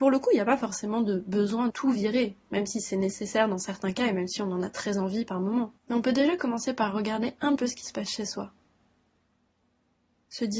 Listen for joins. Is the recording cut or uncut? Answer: cut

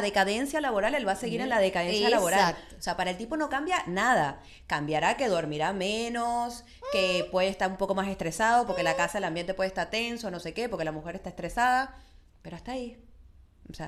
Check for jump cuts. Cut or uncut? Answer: uncut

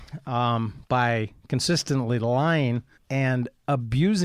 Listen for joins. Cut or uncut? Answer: cut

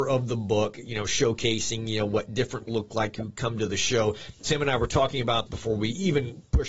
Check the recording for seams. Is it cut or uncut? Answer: cut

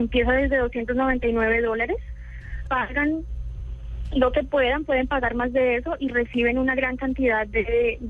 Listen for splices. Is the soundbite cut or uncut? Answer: cut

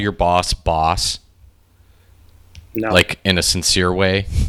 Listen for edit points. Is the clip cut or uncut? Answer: uncut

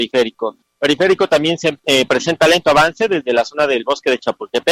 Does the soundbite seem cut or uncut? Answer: uncut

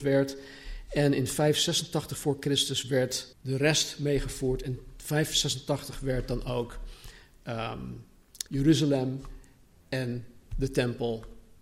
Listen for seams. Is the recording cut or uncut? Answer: cut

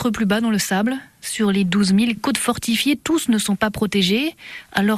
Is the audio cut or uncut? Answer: cut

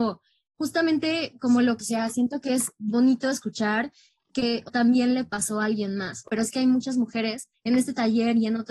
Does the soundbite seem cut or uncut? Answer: cut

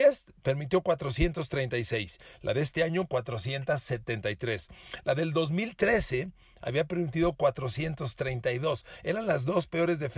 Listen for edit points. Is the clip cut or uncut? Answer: uncut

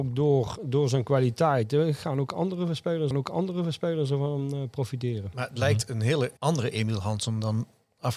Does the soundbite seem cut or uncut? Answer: cut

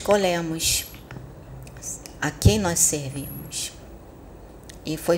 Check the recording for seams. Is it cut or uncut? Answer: uncut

